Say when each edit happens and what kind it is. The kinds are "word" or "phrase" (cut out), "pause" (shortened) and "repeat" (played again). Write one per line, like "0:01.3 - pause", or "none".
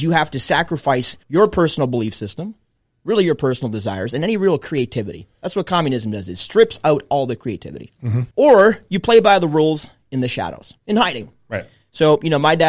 0:01.2 - pause
0:08.3 - pause
0:10.8 - pause